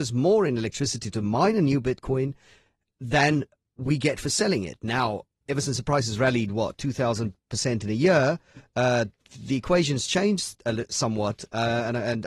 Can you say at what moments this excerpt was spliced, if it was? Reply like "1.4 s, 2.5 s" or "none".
none

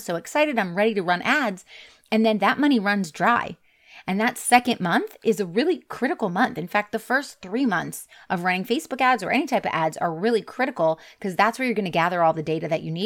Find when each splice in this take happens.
none

